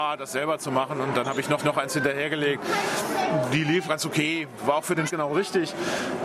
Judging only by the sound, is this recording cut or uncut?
cut